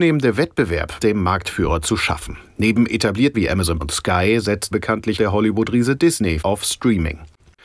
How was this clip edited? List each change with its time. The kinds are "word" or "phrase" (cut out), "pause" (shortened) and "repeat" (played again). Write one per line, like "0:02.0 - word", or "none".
0:01.0 - word
0:03.3 - word
0:03.8 - word
0:04.7 - word
0:05.2 - word
0:06.4 - word